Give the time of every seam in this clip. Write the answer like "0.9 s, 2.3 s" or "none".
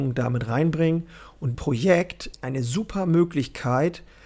1.5 s, 2.3 s

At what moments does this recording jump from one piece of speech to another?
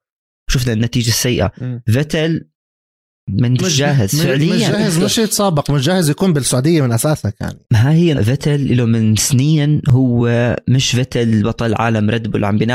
3.6 s, 7.6 s, 8.1 s

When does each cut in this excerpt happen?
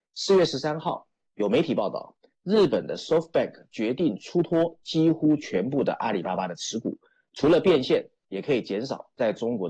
none

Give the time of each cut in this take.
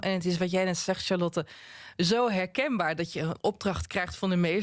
none

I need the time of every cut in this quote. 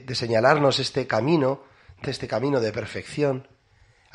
2.0 s

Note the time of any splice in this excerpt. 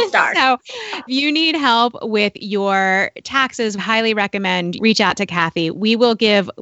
1.1 s, 3.8 s, 4.8 s

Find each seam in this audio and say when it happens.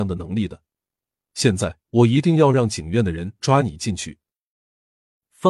1.8 s

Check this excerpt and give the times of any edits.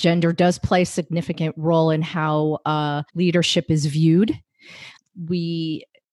3.1 s

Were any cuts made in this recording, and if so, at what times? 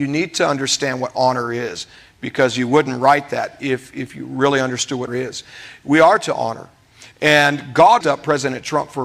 5.1 s, 8.0 s

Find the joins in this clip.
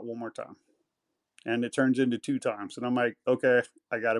none

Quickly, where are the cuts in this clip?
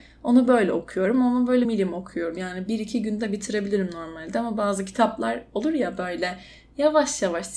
1.6 s

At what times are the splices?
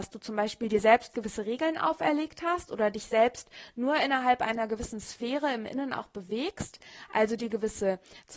none

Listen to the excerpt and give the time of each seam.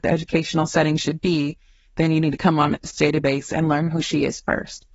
none

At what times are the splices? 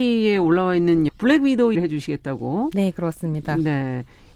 1.1 s, 1.7 s

